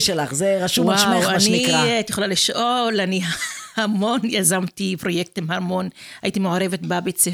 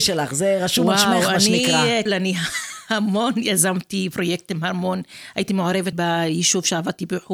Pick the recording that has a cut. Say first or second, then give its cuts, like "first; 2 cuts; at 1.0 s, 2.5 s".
second; 2 cuts; at 2.1 s, 5.9 s